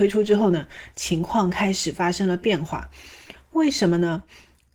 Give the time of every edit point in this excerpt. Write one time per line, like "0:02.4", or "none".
none